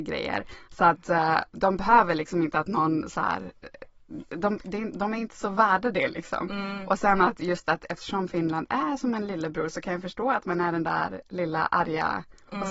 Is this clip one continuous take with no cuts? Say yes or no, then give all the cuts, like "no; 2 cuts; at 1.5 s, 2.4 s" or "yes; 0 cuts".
yes; 0 cuts